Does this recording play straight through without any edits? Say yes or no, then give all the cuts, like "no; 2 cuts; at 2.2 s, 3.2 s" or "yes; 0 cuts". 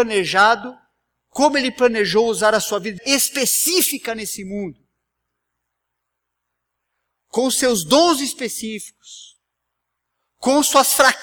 no; 1 cut; at 3.0 s